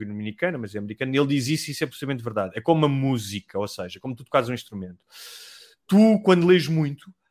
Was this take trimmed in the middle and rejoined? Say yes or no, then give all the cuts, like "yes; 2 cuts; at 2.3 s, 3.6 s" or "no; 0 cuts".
no; 0 cuts